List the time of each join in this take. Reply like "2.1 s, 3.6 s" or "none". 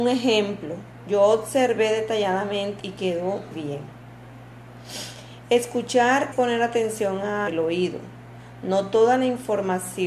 2.8 s, 3.5 s, 6.3 s, 7.5 s